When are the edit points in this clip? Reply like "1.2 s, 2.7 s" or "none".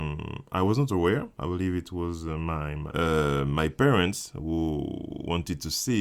1.3 s